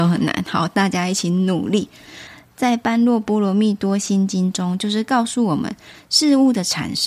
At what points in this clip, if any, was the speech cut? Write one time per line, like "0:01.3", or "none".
none